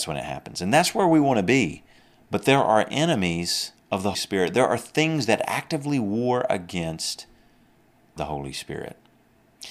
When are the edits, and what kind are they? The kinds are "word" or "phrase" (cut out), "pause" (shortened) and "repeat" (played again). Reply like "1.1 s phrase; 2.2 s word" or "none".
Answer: 2.0 s pause; 3.8 s pause; 4.1 s word; 8.2 s word